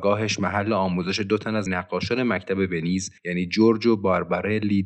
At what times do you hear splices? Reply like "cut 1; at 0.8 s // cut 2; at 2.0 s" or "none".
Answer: cut 1; at 1.7 s // cut 2; at 3.2 s